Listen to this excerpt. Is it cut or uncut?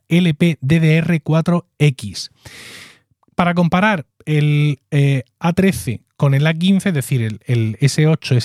uncut